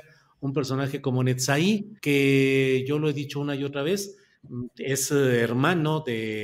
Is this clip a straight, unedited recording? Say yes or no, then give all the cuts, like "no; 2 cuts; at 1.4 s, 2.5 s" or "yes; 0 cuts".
no; 1 cut; at 2.0 s